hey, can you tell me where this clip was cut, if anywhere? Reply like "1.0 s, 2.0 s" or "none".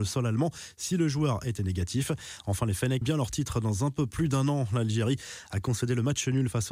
1.6 s, 3.0 s